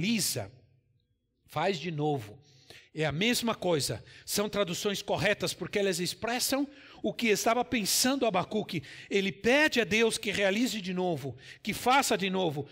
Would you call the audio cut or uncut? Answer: uncut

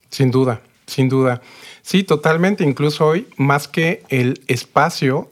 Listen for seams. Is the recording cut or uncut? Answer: uncut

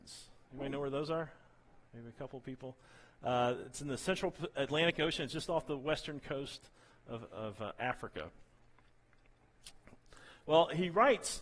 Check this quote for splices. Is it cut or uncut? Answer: uncut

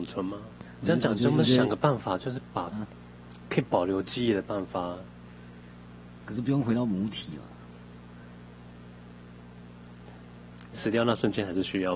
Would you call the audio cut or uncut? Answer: uncut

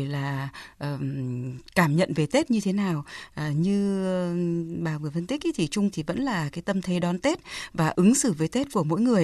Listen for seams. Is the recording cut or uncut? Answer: cut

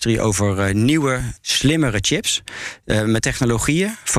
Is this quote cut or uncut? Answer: cut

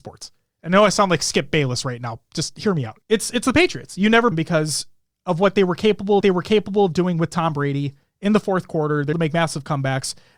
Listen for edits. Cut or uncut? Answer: cut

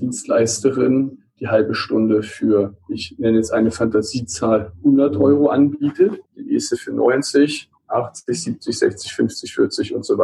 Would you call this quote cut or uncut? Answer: cut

